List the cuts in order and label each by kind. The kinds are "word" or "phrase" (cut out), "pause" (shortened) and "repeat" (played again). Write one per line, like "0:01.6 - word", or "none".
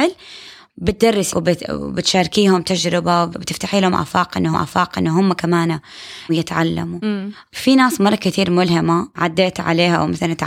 0:01.3 - phrase
0:04.5 - repeat
0:06.3 - word